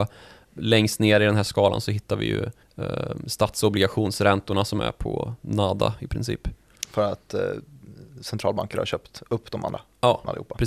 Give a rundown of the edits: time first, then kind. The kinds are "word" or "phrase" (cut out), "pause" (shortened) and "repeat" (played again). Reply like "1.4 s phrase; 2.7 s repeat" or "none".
2.6 s pause